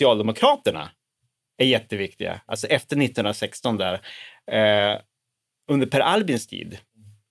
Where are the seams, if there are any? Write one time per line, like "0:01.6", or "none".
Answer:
none